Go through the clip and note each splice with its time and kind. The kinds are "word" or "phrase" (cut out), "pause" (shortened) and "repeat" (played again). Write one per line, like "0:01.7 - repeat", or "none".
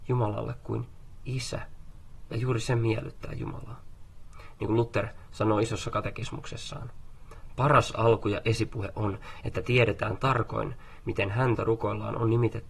0:11.6 - word